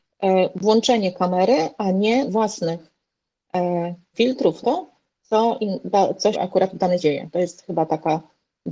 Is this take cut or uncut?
cut